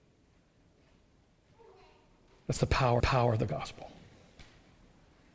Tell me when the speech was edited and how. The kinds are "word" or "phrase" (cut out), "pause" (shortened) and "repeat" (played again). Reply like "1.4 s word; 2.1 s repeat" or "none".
3.0 s repeat